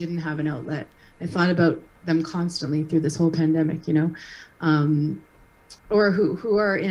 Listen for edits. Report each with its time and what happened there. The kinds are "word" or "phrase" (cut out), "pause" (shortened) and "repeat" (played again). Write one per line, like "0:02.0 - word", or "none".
0:05.8 - pause

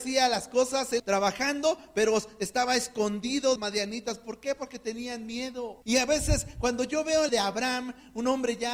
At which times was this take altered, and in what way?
0:01.0 - phrase
0:03.6 - phrase
0:05.8 - pause
0:07.3 - phrase

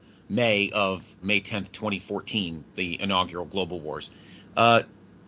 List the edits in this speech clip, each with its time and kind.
0:01.2 - word

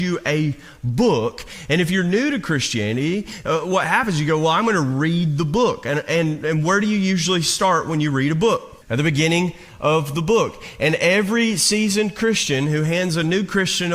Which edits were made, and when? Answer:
0:08.8 - pause

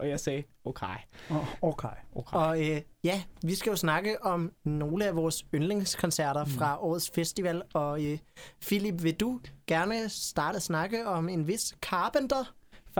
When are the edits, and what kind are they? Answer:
0:10.5 - word

